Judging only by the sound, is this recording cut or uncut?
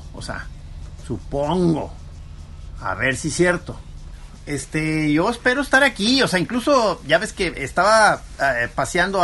uncut